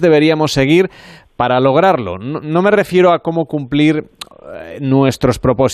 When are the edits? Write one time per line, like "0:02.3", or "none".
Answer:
none